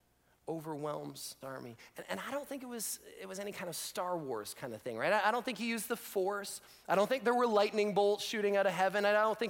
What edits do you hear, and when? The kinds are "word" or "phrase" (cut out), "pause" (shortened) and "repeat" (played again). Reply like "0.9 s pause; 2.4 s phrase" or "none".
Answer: 1.4 s word